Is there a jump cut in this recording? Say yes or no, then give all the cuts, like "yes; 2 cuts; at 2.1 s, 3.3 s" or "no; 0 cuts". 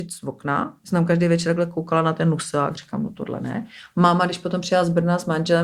no; 0 cuts